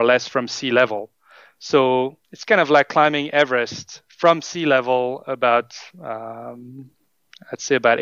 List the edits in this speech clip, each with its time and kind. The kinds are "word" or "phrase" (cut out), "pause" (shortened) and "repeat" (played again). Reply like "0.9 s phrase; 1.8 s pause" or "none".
2.2 s pause